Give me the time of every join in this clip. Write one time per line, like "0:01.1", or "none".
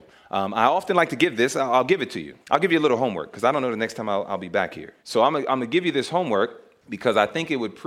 0:02.4
0:05.0
0:06.8